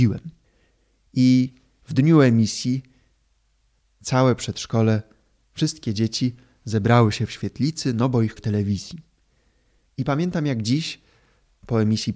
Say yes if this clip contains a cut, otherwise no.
yes